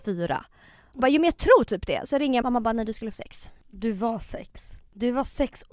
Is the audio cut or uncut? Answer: cut